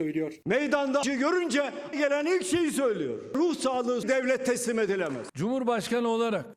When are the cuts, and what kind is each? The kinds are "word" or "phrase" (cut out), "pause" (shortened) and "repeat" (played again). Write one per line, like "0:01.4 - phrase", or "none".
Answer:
0:01.0 - word
0:01.9 - word
0:04.0 - phrase